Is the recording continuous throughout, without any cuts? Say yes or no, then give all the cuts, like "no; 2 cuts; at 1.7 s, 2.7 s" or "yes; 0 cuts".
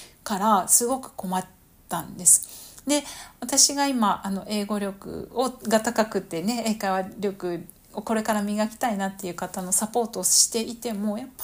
yes; 0 cuts